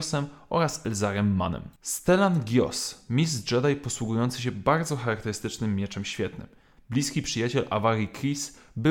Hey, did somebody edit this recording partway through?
no; 0 cuts

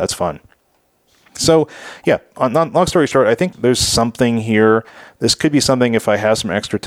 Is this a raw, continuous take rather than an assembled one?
no; 1 cut; at 3.5 s

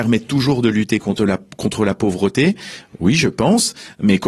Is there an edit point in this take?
no; 0 cuts

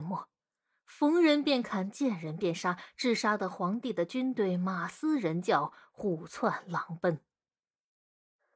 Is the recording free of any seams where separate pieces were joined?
yes; 0 cuts

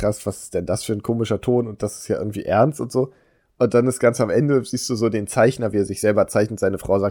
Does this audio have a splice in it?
no; 0 cuts

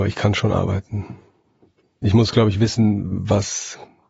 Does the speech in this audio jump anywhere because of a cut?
no; 0 cuts

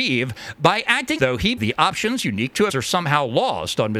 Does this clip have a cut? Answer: yes; 3 cuts; at 1.2 s, 1.6 s, 2.7 s

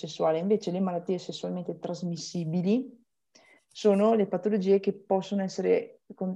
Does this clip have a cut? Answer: no; 0 cuts

